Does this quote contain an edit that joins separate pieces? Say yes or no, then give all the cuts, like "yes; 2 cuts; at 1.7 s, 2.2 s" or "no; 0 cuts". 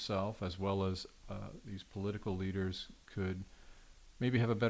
no; 0 cuts